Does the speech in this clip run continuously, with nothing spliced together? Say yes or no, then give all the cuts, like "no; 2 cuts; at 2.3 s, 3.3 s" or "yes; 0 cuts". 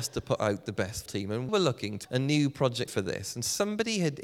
no; 4 cuts; at 1.1 s, 1.5 s, 2.0 s, 2.9 s